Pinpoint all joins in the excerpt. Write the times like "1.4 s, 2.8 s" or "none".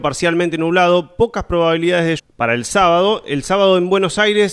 2.2 s